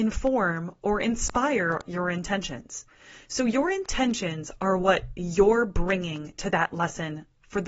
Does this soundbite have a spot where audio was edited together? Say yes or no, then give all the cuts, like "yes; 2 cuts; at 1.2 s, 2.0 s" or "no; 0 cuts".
no; 0 cuts